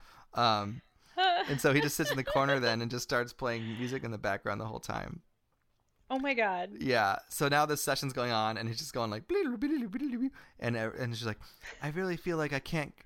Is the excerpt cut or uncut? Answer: uncut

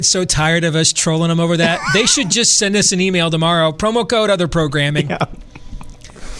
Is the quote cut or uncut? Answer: uncut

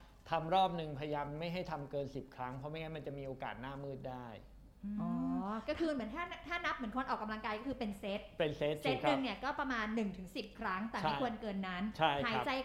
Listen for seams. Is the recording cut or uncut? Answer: uncut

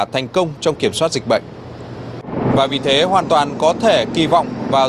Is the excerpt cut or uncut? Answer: uncut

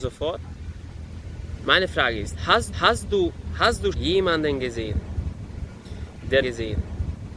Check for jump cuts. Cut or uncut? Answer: cut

